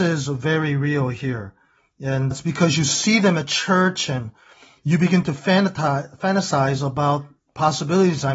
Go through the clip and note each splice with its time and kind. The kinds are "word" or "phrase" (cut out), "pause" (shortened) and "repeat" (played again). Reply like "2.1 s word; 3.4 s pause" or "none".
2.3 s word